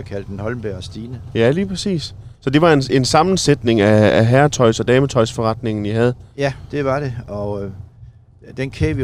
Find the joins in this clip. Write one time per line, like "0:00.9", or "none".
0:02.4